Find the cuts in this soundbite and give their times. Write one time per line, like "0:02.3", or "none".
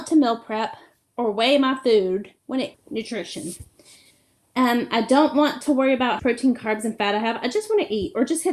0:02.4
0:02.7
0:06.2